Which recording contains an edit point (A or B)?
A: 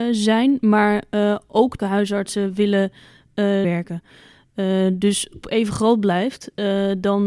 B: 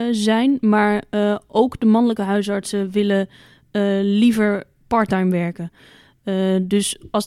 A